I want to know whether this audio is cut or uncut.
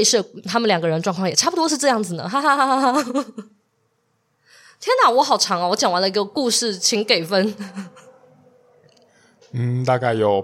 uncut